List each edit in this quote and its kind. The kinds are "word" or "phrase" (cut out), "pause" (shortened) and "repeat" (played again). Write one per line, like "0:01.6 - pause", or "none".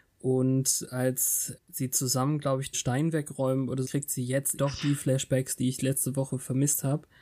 0:01.6 - word
0:02.7 - word
0:03.8 - word
0:04.6 - word